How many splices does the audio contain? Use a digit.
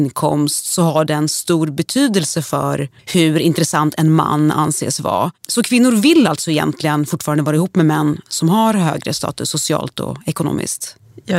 1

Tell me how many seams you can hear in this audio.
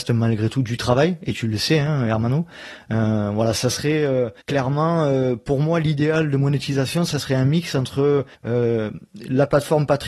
2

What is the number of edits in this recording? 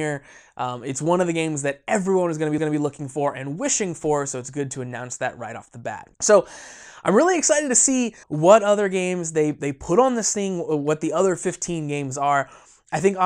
3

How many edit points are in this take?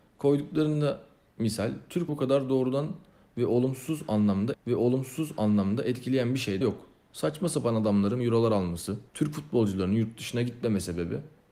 5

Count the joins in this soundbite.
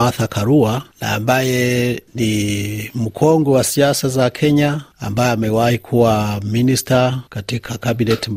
3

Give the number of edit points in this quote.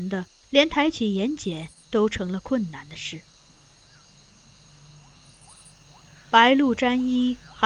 0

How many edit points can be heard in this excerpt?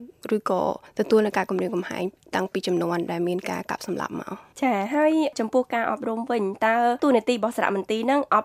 0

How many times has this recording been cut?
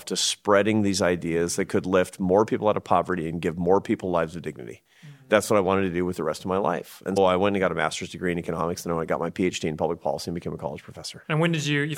1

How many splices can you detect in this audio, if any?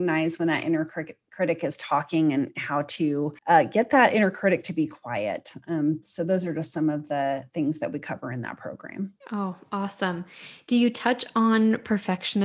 2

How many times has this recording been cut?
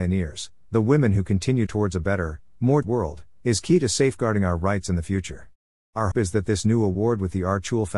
3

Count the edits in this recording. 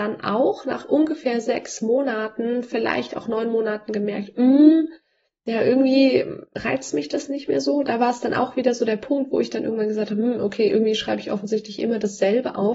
0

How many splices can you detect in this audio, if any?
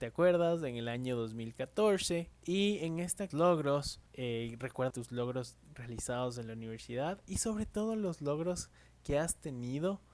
4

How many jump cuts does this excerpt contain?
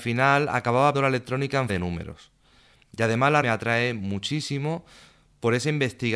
3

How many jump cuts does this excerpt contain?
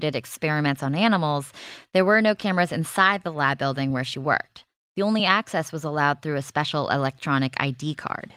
0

